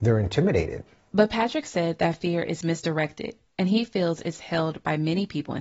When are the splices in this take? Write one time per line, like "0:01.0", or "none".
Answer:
none

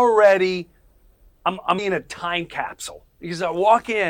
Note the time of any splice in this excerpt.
0:01.4
0:01.8
0:03.1

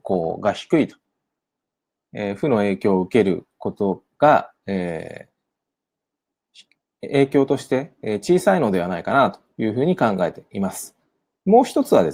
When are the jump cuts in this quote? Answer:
none

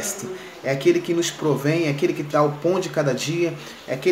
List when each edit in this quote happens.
0:02.3

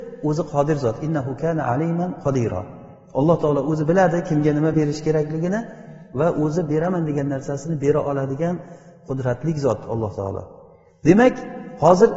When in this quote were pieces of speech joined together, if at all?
none

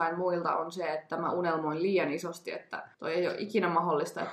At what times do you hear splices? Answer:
0:02.9

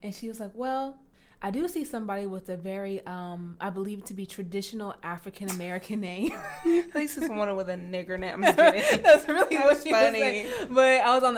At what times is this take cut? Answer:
0:01.1

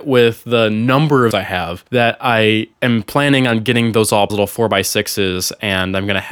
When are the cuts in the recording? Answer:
0:01.3
0:01.9
0:02.7
0:04.3

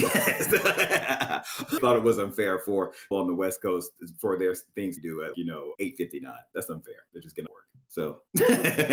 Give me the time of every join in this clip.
0:01.8
0:03.1
0:05.0
0:05.3
0:05.7
0:07.5

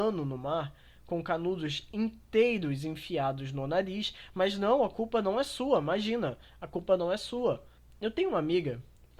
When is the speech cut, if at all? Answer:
none

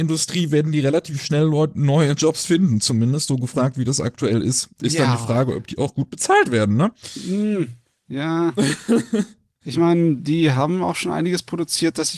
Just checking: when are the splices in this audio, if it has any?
none

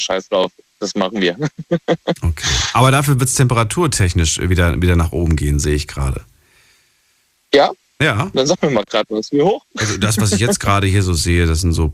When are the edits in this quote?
none

